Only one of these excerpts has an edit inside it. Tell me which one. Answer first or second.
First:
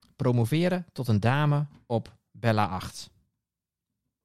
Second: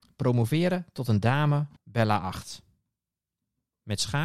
second